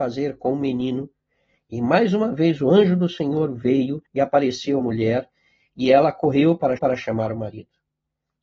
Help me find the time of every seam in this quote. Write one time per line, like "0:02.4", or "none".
0:04.1
0:04.8
0:06.8